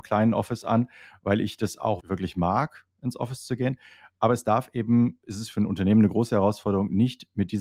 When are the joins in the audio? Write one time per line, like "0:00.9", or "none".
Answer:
0:02.0